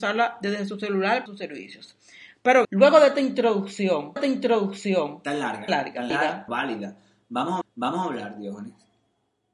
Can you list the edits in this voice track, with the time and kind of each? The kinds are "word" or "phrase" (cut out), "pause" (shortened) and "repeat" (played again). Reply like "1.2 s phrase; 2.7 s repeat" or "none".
1.3 s word; 2.6 s word; 4.2 s repeat; 5.7 s phrase; 6.1 s phrase; 6.5 s word; 7.6 s repeat